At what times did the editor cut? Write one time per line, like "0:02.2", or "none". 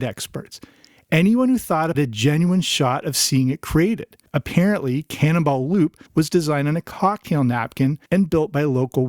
0:01.9
0:04.3
0:06.1
0:08.1